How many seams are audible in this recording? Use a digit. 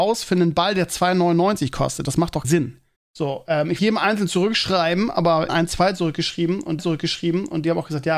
5